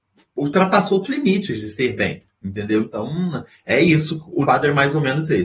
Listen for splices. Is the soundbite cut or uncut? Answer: cut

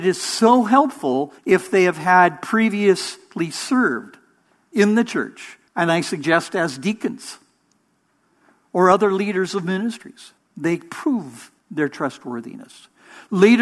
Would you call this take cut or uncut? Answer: cut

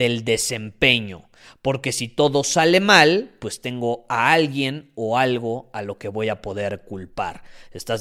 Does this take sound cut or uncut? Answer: uncut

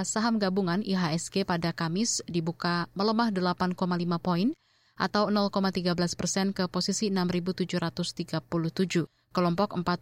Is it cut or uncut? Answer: uncut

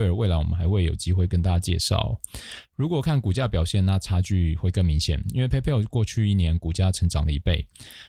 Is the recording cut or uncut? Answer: uncut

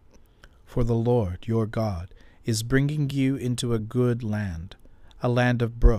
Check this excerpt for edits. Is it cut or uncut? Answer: uncut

